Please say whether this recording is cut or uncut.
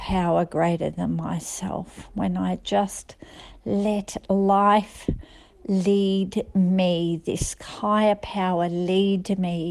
uncut